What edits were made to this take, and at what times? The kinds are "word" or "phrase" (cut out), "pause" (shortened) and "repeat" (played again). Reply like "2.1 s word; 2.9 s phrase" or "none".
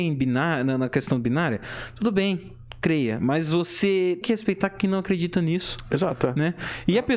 4.2 s word